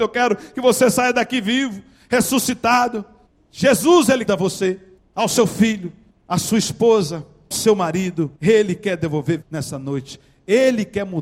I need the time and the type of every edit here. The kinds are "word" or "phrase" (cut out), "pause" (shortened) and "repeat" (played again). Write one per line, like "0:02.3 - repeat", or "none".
0:03.3 - pause
0:04.3 - phrase
0:05.0 - pause
0:06.1 - pause
0:07.5 - word
0:08.3 - pause
0:09.4 - word